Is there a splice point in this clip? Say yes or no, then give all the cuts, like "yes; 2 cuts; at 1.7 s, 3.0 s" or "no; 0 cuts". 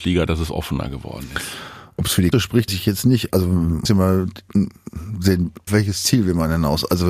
yes; 4 cuts; at 2.3 s, 2.7 s, 3.8 s, 5.7 s